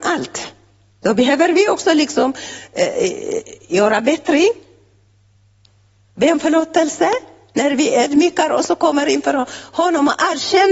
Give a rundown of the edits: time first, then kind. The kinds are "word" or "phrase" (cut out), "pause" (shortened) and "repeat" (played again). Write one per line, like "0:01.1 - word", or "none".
none